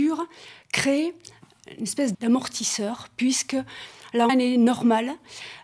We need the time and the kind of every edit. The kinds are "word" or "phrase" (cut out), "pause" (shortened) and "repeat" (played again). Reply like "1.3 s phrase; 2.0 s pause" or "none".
2.1 s word; 4.3 s phrase